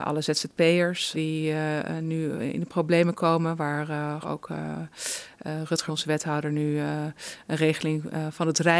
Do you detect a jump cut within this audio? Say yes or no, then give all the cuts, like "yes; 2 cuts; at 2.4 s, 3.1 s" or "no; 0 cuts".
yes; 3 cuts; at 1.1 s, 4.2 s, 5.9 s